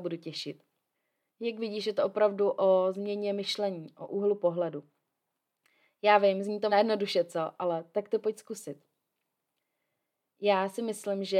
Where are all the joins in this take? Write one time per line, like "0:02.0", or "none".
0:00.9
0:06.7

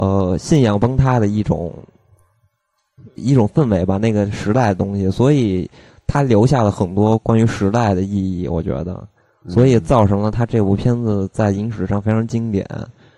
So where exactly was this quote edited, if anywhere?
0:03.2

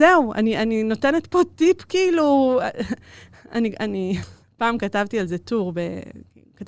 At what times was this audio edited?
none

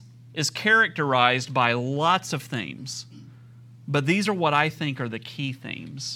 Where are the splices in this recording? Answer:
none

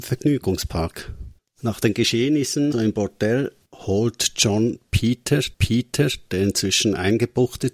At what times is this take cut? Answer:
0:01.4
0:02.7
0:03.7
0:05.5

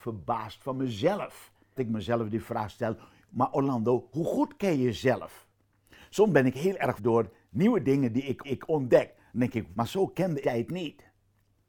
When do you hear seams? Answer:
0:01.8
0:07.0
0:08.4
0:09.7
0:10.4

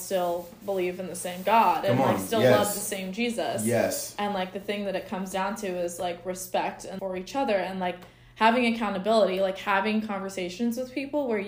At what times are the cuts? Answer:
0:07.0

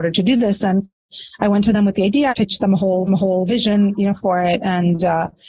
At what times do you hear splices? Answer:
0:02.3
0:03.1

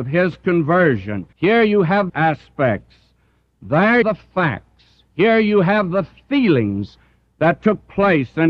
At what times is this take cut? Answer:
0:01.3
0:02.1
0:04.0

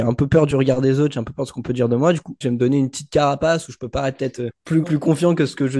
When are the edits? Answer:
0:02.4
0:04.5
0:04.8

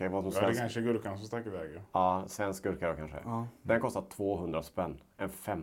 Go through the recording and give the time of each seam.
none

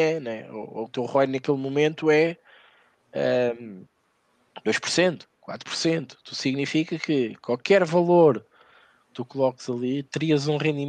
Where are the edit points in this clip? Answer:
none

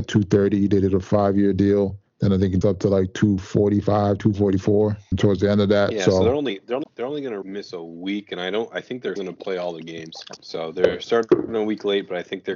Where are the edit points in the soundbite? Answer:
0:02.6
0:06.8
0:07.4
0:09.2

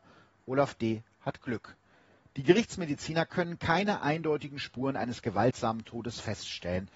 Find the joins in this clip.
none

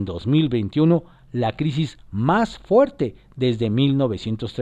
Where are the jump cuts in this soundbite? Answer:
none

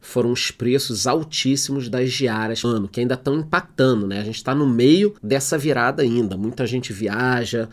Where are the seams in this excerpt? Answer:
0:02.6
0:05.2

